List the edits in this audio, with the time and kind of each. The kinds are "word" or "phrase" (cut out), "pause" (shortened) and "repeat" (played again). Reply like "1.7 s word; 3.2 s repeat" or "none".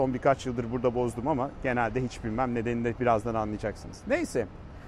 none